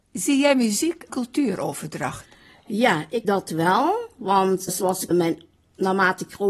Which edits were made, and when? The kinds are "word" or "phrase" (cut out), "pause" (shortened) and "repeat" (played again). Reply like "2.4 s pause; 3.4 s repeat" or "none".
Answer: 1.1 s phrase; 3.2 s word; 4.7 s word; 5.1 s word